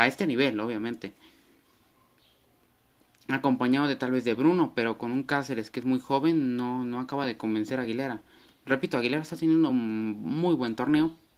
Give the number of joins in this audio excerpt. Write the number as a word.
zero